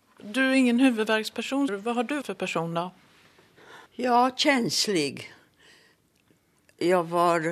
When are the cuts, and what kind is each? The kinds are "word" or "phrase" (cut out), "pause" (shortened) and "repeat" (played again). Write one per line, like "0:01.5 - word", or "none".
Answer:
0:01.7 - word
0:02.2 - word
0:03.9 - pause